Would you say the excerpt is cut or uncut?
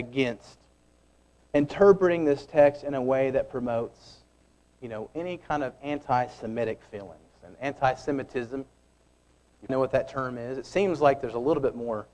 cut